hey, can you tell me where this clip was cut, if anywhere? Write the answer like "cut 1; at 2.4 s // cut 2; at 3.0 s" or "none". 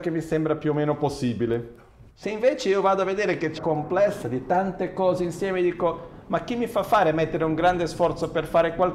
cut 1; at 2.1 s // cut 2; at 3.6 s // cut 3; at 4.2 s